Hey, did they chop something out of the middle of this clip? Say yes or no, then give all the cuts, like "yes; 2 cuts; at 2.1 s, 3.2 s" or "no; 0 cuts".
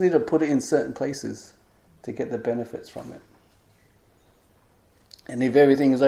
no; 0 cuts